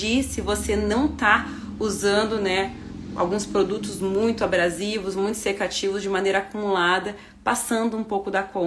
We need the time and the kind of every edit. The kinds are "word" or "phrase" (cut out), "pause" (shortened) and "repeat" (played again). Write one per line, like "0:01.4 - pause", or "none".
none

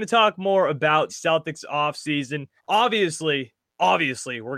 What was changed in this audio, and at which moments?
0:01.1 - word
0:02.6 - pause

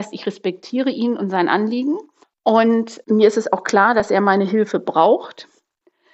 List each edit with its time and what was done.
0:02.2 - pause

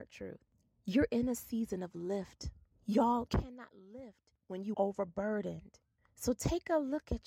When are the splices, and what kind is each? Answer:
0:03.3 - word
0:04.7 - word

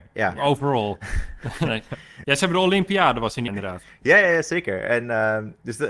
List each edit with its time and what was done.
0:03.5 - word

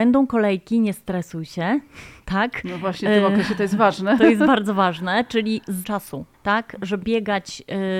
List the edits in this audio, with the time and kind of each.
0:05.8 - word
0:06.3 - pause
0:07.0 - word

